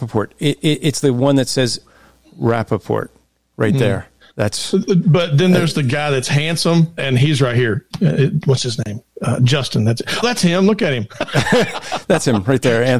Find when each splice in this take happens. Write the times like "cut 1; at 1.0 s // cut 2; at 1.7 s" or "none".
cut 1; at 1.8 s // cut 2; at 7.0 s // cut 3; at 10.2 s

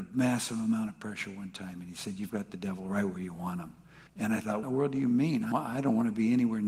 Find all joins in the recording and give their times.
cut 1; at 4.1 s // cut 2; at 4.6 s // cut 3; at 5.5 s

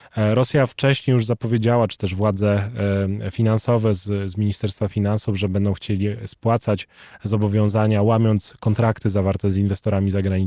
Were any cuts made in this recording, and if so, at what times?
none

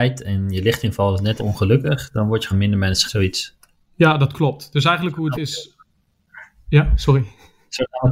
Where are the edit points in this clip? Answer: cut 1; at 1.4 s // cut 2; at 2.5 s // cut 3; at 3.1 s // cut 4; at 5.3 s

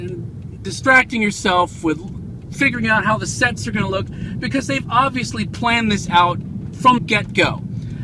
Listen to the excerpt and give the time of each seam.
cut 1; at 7.0 s

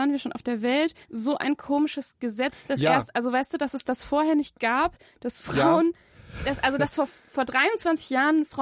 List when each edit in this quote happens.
cut 1; at 1.0 s

